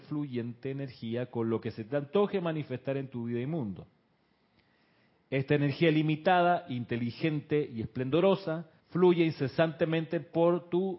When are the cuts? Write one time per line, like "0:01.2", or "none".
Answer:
0:08.8